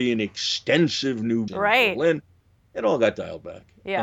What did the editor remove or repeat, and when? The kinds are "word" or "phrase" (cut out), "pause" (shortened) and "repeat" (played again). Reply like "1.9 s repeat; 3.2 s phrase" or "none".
1.5 s word